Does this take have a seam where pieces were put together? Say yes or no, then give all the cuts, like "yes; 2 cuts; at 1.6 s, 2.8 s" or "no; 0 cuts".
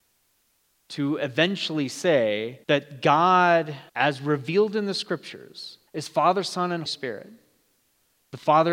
yes; 4 cuts; at 2.6 s, 3.9 s, 5.9 s, 6.9 s